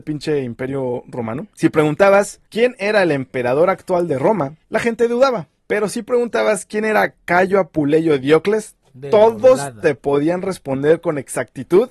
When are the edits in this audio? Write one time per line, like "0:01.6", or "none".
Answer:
0:01.5
0:02.5
0:04.6
0:05.6